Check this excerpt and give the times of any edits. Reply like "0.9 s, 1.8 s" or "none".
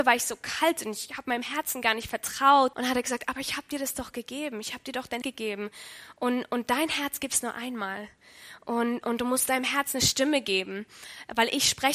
2.7 s, 5.2 s